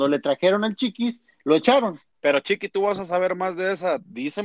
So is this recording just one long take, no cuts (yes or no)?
no